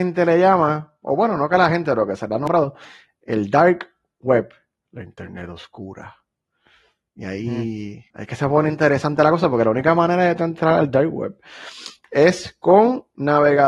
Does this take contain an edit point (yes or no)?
yes